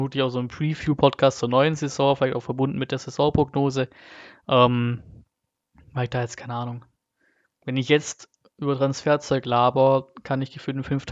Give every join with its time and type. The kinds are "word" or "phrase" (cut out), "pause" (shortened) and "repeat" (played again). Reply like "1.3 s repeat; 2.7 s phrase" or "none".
none